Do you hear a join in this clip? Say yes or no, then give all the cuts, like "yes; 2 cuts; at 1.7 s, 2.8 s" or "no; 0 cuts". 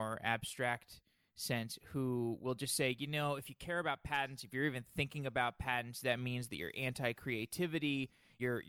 no; 0 cuts